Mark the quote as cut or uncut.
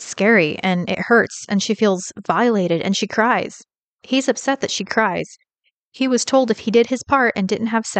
uncut